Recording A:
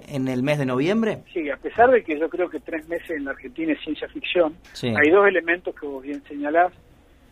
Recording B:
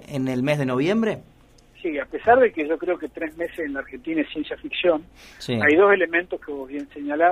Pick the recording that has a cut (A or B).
A